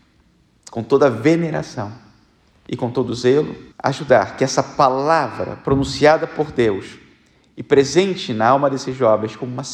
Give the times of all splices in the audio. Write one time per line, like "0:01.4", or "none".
0:03.7